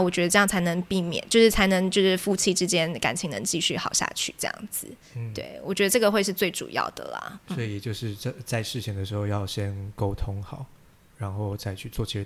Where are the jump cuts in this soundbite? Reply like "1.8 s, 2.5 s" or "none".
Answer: none